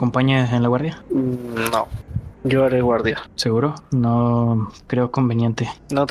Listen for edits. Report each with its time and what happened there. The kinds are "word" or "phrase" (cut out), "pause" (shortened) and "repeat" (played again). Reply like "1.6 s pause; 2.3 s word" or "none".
2.4 s pause